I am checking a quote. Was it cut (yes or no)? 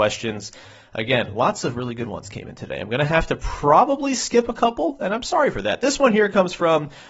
no